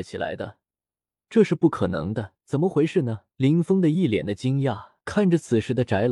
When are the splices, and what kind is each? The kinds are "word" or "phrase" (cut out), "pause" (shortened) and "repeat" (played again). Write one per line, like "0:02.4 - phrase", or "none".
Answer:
0:02.4 - pause
0:03.3 - pause
0:05.0 - pause